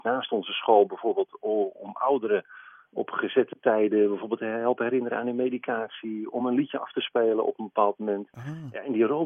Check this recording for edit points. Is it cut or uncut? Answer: uncut